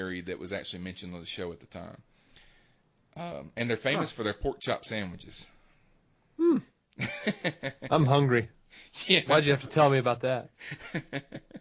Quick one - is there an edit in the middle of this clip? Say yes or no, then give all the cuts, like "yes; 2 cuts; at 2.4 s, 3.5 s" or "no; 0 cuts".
no; 0 cuts